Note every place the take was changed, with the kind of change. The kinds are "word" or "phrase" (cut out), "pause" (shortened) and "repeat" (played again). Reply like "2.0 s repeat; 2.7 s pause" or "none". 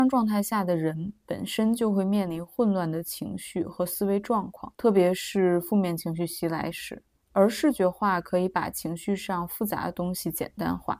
4.7 s pause; 7.2 s pause